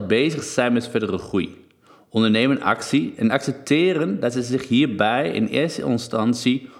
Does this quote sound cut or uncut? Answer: uncut